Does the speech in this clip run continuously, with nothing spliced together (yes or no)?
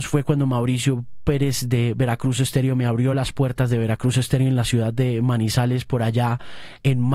yes